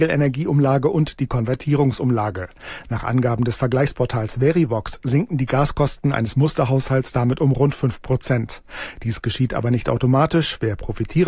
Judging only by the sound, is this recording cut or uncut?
uncut